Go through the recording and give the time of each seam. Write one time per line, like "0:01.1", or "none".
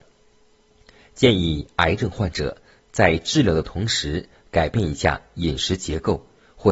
none